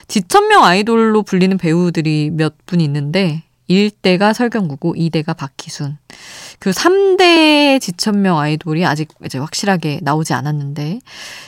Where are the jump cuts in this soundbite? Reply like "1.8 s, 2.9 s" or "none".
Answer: none